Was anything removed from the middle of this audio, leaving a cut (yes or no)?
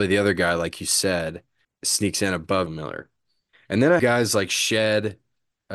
yes